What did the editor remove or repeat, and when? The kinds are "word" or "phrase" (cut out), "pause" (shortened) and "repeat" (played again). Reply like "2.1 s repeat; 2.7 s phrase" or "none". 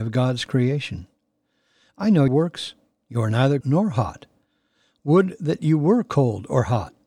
2.3 s word; 3.6 s word